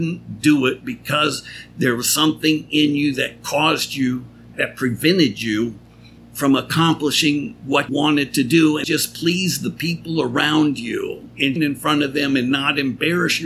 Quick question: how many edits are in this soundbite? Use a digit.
5